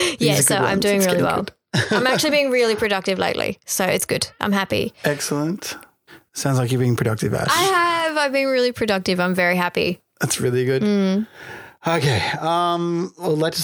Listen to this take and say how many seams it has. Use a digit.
1